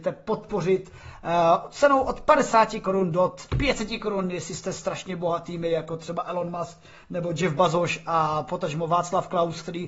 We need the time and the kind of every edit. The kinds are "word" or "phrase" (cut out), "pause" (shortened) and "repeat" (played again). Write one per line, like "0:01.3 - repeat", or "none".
0:03.5 - word